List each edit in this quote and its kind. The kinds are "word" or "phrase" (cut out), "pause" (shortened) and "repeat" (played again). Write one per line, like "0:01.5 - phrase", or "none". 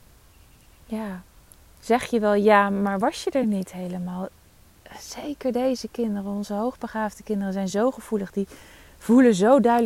none